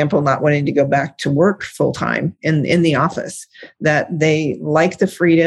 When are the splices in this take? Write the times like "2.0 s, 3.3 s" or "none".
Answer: none